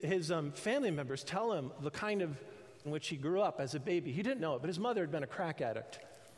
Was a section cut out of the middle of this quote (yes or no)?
yes